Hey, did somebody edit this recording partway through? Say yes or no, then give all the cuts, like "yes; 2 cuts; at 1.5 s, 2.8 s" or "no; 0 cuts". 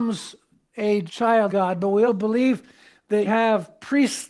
yes; 4 cuts; at 1.1 s, 1.5 s, 2.1 s, 3.2 s